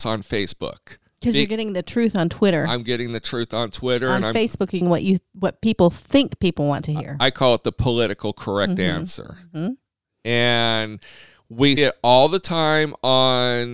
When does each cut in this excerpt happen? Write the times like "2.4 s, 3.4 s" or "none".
4.8 s, 11.8 s